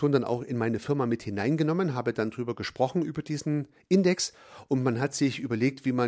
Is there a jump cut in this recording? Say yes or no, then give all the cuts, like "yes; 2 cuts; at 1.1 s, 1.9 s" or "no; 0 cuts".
no; 0 cuts